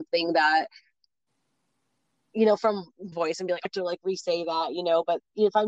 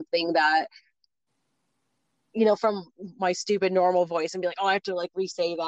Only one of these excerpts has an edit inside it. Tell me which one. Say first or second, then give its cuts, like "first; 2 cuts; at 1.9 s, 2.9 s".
first; 2 cuts; at 3.1 s, 3.7 s